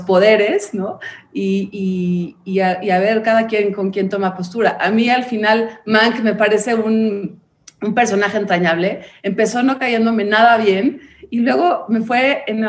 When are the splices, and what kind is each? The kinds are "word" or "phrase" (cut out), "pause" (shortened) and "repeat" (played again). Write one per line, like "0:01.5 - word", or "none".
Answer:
none